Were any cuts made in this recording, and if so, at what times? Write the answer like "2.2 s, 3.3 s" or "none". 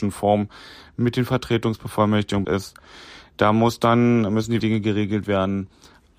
2.4 s, 4.6 s